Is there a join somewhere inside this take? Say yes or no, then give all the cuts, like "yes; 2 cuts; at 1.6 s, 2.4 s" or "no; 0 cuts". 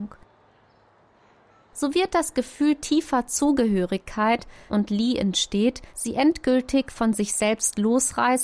yes; 2 cuts; at 4.7 s, 5.9 s